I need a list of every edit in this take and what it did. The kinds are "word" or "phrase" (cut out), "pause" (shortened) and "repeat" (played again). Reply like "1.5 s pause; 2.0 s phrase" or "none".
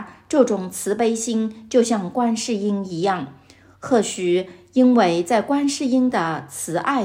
none